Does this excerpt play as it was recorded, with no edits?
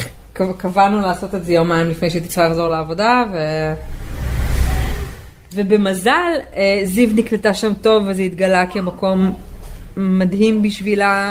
yes; 0 cuts

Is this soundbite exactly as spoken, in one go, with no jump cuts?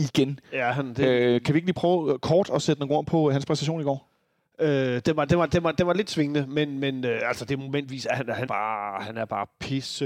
no; 1 cut; at 8.5 s

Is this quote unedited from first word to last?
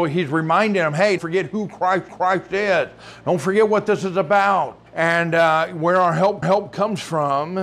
no; 4 cuts; at 1.2 s, 2.1 s, 4.9 s, 6.4 s

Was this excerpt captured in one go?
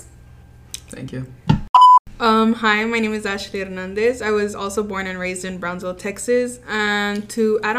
yes; 0 cuts

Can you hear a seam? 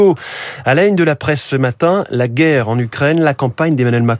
no; 0 cuts

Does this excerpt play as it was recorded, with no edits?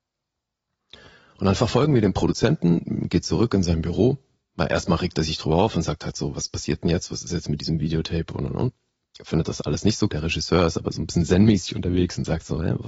no; 1 cut; at 10.1 s

